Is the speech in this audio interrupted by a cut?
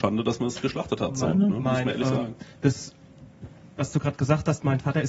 no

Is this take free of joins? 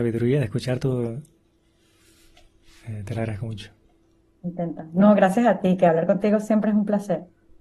yes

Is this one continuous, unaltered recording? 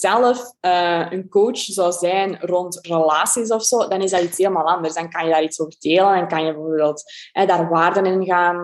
yes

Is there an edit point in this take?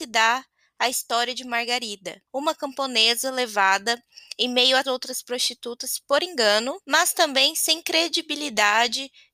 yes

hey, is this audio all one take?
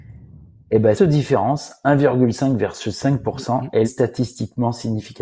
no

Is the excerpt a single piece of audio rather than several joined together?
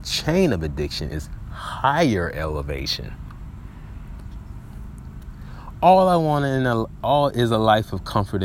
yes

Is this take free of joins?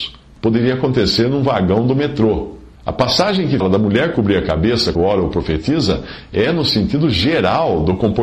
no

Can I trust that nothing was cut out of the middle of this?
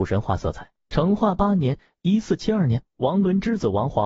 yes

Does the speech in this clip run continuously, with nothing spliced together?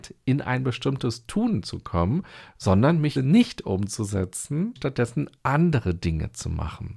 no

